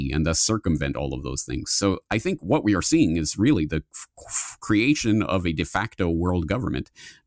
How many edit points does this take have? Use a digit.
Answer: 0